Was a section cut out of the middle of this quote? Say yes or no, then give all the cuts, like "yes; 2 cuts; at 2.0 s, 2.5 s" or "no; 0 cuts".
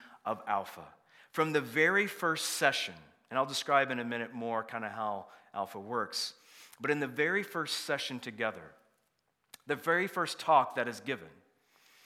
no; 0 cuts